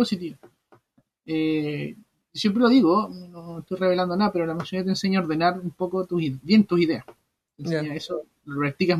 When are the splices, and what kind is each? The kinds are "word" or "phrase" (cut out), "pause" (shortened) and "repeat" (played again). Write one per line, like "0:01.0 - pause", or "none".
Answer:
none